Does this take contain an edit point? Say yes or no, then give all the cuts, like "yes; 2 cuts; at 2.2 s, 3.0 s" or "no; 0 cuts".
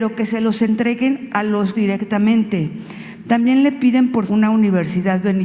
yes; 2 cuts; at 1.7 s, 4.3 s